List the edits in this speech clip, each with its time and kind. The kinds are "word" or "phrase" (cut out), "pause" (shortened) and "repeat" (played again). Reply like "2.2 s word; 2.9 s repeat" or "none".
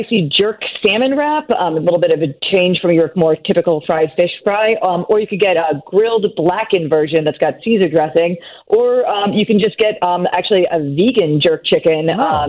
none

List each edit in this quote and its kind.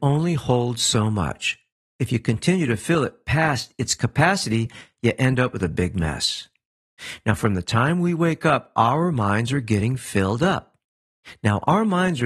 none

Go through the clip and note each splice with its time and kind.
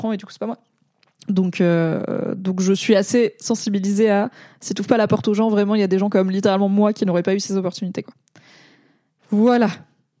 none

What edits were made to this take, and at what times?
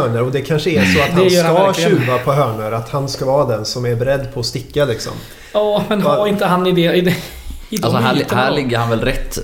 none

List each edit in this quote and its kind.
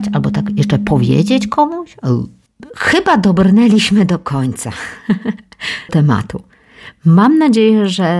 5.9 s word

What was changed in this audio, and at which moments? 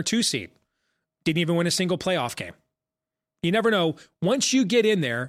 none

